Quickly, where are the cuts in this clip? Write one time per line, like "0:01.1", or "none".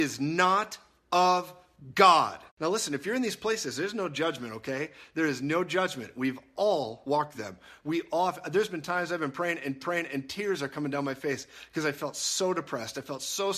0:02.5
0:07.3
0:09.8